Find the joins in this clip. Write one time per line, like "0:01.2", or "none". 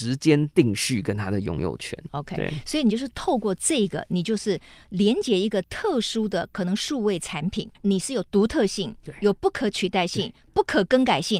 0:07.7